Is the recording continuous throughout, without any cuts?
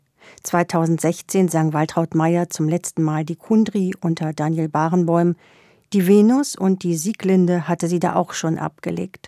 yes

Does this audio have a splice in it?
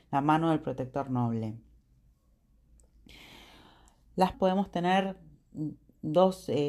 yes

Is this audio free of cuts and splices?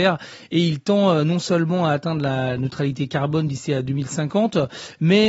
yes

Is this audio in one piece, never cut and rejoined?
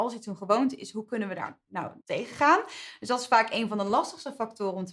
no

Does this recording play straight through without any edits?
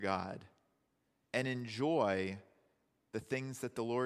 yes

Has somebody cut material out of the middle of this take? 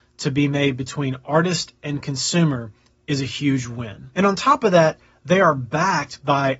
no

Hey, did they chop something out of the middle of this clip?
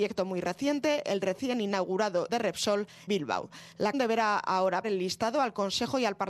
yes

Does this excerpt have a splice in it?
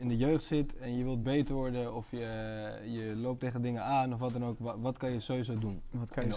no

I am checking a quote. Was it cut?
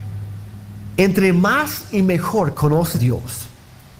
yes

